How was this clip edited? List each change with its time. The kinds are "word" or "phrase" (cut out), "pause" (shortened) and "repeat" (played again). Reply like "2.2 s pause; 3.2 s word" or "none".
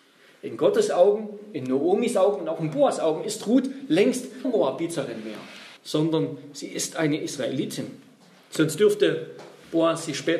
4.4 s word; 5.8 s pause